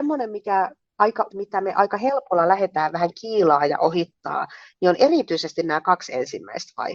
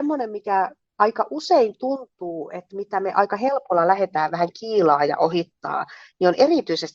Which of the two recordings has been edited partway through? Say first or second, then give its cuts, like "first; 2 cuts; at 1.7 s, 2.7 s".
first; 1 cut; at 1.3 s